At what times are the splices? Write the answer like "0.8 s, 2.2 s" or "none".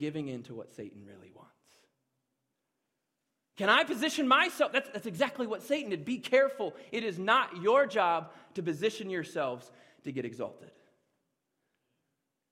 none